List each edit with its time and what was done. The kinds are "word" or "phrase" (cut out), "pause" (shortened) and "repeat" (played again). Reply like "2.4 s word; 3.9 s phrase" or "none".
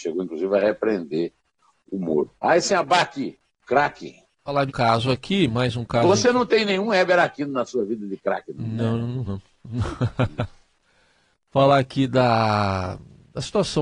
2.4 s pause; 3.6 s word; 4.7 s word; 9.2 s word

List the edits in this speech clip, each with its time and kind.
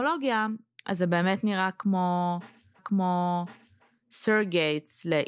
2.8 s repeat

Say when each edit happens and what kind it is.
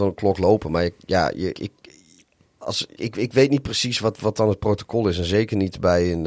1.5 s word; 3.0 s word; 4.2 s word

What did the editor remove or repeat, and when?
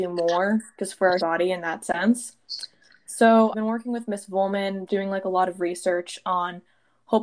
1.2 s word; 3.5 s word; 4.9 s word

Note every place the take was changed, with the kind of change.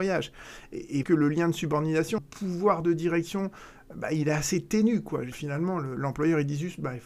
1.0 s word; 2.2 s word; 5.3 s word

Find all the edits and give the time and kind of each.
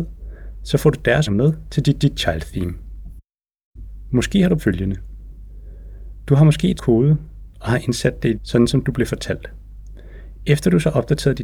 1.3 s word; 2.0 s repeat; 4.6 s word; 6.8 s word; 8.3 s phrase

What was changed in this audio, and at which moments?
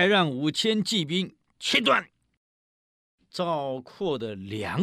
none

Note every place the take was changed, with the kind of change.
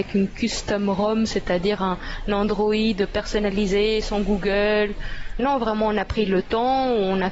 5.4 s word

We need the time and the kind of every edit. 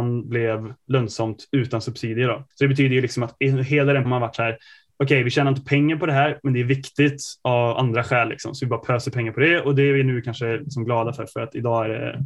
2.5 s pause; 4.0 s word

